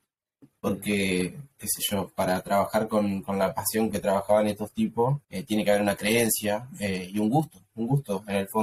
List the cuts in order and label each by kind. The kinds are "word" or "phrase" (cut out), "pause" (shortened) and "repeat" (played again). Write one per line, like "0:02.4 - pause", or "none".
0:05.2 - pause